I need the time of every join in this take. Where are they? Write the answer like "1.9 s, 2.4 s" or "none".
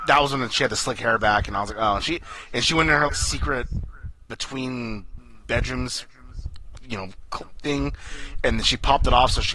3.1 s